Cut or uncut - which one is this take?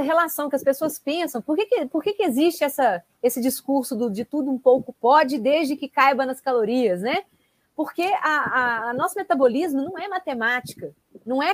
uncut